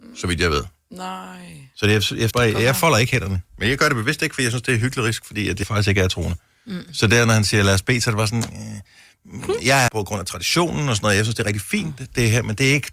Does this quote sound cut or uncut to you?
cut